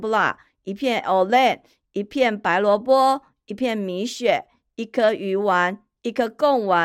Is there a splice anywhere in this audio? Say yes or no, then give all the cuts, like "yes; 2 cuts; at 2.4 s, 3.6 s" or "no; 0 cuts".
no; 0 cuts